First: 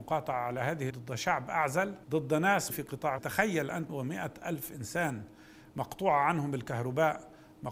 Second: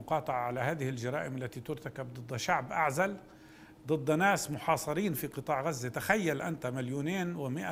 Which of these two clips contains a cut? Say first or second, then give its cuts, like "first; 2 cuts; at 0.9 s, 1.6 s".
first; 5 cuts; at 0.9 s, 2.0 s, 2.7 s, 3.2 s, 3.9 s